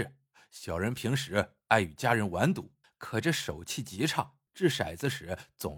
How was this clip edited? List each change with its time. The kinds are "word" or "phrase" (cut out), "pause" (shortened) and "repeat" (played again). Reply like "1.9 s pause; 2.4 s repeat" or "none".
2.8 s pause; 4.5 s pause